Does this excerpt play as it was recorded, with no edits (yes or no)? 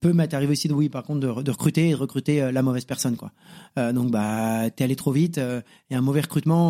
yes